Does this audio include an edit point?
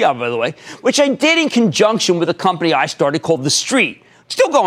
no; 0 cuts

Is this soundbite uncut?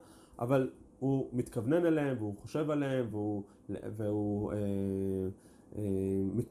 yes; 0 cuts

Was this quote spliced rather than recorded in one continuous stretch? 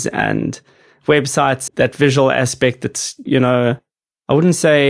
yes; 2 cuts; at 1.7 s, 3.3 s

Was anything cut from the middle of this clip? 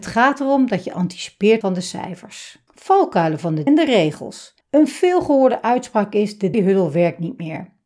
yes; 5 cuts; at 1.6 s, 2.7 s, 3.7 s, 4.6 s, 6.5 s

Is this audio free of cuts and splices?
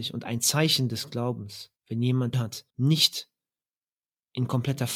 no; 3 cuts; at 1.8 s, 2.3 s, 2.7 s

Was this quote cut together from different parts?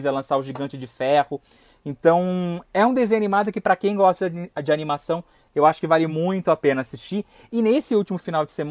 no; 0 cuts

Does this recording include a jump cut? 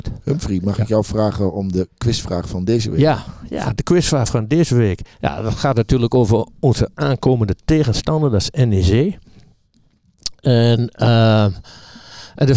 yes; 2 cuts; at 5.1 s, 6.9 s

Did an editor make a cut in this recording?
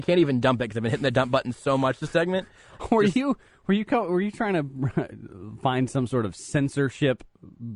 no; 0 cuts

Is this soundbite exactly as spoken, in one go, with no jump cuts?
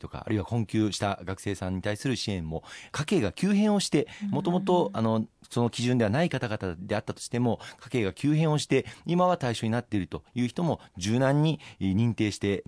yes; 0 cuts

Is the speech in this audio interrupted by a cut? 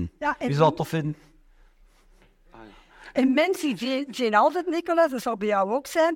no; 0 cuts

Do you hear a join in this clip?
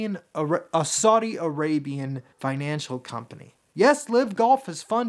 yes; 2 cuts; at 2.3 s, 3.6 s

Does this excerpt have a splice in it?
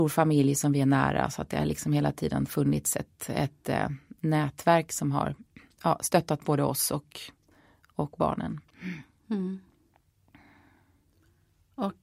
no; 0 cuts

